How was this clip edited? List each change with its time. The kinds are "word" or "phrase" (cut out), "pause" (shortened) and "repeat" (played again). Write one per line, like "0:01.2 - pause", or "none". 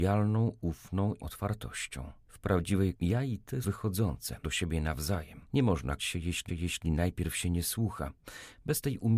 0:01.2 - word
0:02.9 - word
0:03.6 - word
0:04.4 - word
0:05.5 - pause
0:06.0 - word
0:06.5 - repeat